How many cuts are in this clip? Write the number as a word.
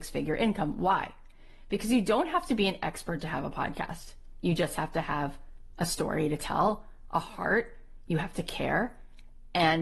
zero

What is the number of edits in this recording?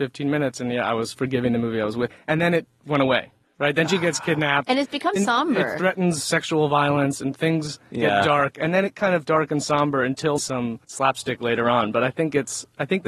six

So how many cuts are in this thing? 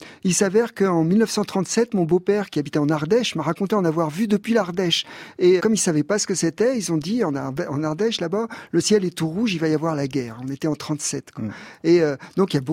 one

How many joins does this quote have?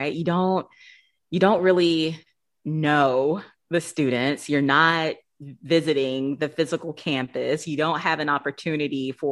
zero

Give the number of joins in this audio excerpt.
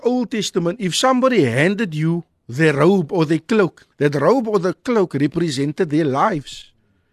one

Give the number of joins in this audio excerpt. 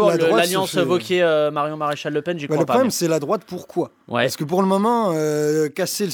zero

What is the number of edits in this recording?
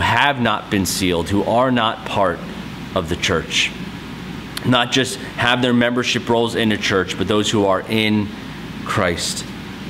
zero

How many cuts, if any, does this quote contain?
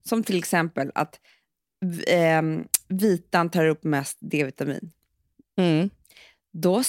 zero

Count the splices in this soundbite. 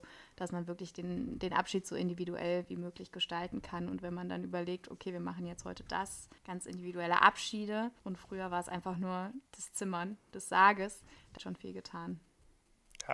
four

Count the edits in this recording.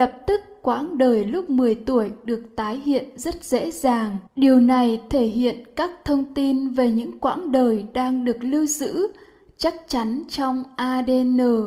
one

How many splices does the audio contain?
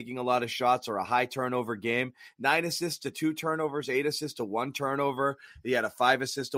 zero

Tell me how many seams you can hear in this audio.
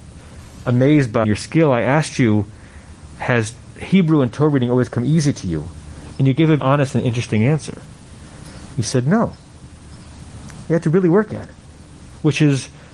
two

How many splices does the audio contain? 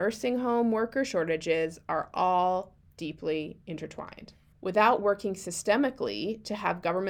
one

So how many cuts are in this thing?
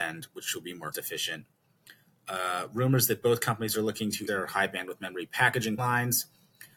three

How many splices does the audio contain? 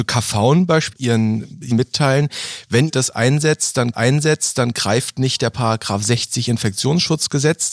four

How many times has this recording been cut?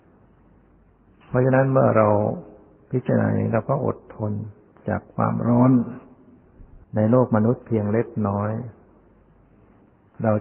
one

